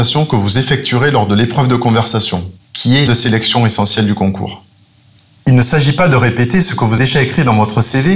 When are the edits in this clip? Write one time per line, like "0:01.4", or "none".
0:02.6
0:03.1
0:07.0